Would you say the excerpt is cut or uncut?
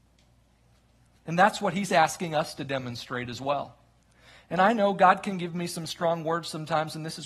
uncut